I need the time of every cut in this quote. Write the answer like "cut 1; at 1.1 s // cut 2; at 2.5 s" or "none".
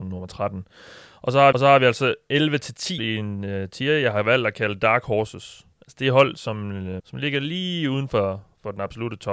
cut 1; at 1.5 s // cut 2; at 3.0 s // cut 3; at 5.7 s // cut 4; at 7.0 s